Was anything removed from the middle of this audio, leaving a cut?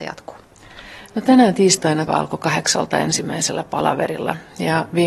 yes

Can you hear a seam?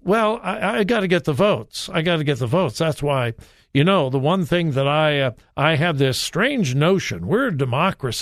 no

